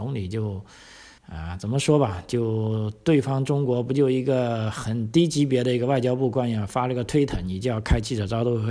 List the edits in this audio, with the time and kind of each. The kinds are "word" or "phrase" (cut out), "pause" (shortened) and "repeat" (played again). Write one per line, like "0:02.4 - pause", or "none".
0:01.2 - pause